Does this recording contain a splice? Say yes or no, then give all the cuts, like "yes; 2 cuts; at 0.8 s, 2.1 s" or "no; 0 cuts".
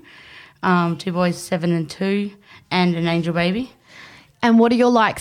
no; 0 cuts